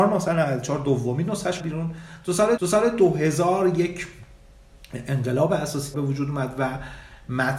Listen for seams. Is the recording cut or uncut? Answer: cut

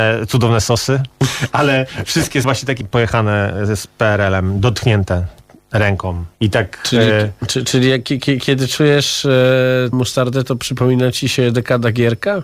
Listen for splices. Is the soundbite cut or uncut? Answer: cut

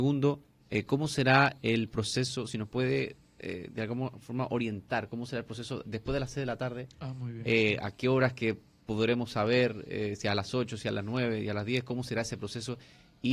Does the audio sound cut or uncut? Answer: uncut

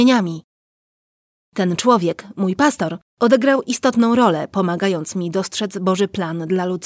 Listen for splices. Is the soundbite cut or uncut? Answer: cut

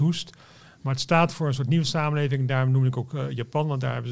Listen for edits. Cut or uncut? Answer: uncut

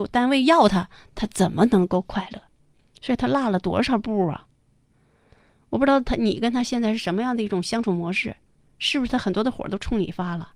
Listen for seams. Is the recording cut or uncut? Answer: uncut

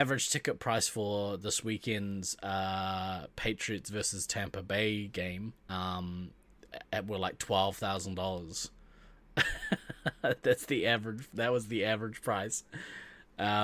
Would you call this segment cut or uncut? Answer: cut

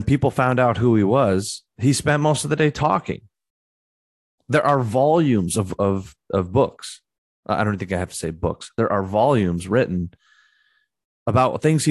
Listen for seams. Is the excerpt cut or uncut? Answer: uncut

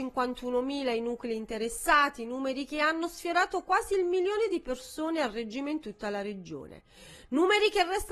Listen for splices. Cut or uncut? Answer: uncut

